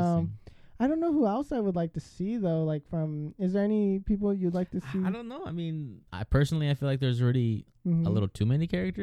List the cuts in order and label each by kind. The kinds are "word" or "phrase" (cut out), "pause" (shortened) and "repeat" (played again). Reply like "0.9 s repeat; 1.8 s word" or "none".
6.1 s pause